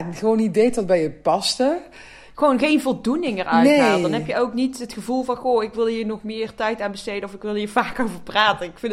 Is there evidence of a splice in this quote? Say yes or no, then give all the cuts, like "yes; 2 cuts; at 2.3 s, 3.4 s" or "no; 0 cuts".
no; 0 cuts